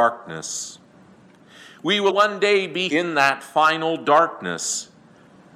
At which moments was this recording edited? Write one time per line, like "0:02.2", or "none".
0:02.1
0:02.9